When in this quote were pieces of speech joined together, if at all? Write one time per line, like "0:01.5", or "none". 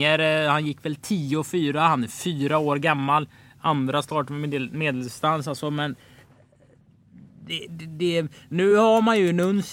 none